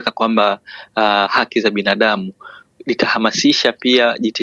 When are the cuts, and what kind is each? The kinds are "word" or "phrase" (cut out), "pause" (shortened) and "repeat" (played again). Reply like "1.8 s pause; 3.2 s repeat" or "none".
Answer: none